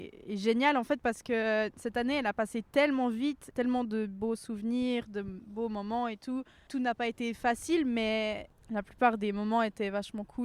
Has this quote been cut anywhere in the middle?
no; 0 cuts

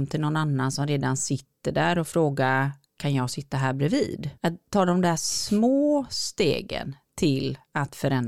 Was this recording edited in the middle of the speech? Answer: yes; 1 cut; at 4.4 s

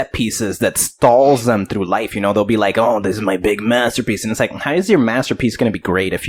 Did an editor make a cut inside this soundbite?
no; 0 cuts

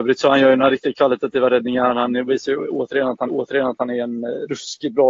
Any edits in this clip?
yes; 1 cut; at 3.3 s

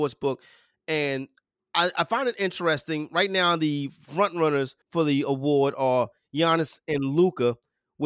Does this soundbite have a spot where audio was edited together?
yes; 1 cut; at 4.8 s

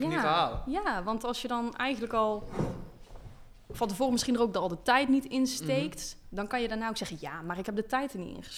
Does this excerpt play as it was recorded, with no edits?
yes; 0 cuts

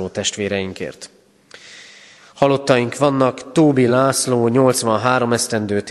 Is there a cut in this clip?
no; 0 cuts

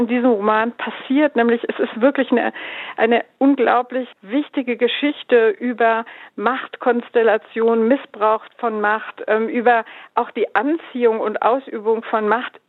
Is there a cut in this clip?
yes; 1 cut; at 4.1 s

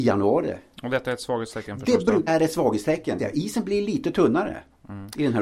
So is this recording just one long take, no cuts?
no; 2 cuts; at 2.3 s, 3.2 s

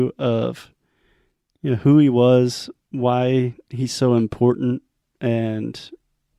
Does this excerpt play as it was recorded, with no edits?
no; 1 cut; at 2.8 s

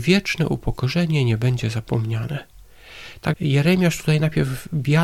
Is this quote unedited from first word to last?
no; 1 cut; at 3.3 s

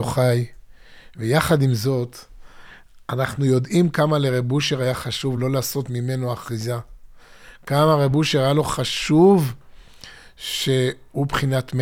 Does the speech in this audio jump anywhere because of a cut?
no; 0 cuts

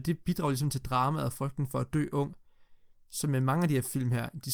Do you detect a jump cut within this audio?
no; 0 cuts

